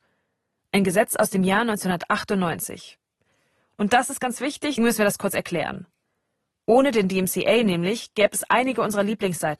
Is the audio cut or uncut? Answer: cut